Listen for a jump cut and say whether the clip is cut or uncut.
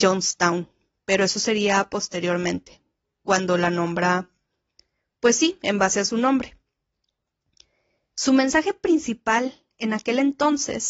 uncut